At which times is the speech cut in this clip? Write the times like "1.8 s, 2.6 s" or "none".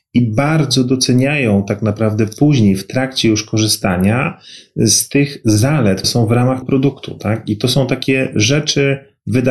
6.0 s, 6.6 s